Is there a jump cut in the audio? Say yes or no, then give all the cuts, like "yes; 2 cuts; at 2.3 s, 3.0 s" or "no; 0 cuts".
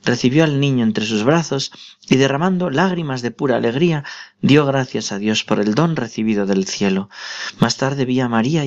no; 0 cuts